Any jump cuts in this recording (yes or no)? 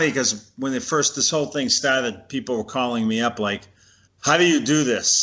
no